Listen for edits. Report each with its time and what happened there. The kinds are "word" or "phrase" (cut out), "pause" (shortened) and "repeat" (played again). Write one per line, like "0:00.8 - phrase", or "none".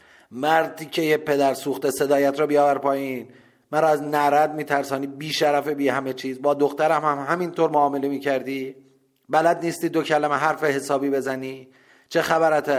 none